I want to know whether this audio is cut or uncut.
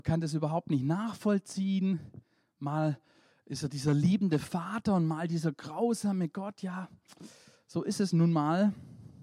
uncut